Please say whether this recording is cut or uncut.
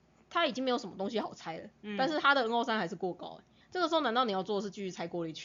uncut